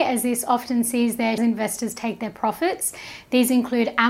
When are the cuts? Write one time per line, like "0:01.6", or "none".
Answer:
0:01.4

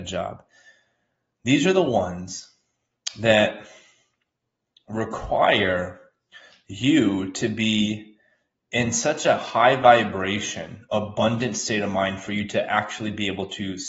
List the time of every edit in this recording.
none

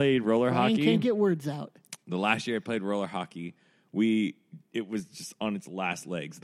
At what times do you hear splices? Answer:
none

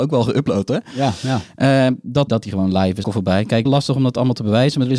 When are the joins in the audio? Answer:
0:02.3
0:03.0
0:03.7

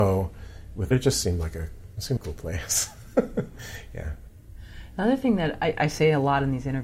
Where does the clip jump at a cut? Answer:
0:00.9
0:02.2

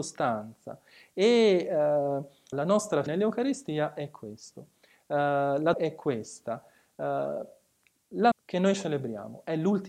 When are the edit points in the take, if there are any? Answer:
0:02.5
0:03.1
0:05.7
0:08.3

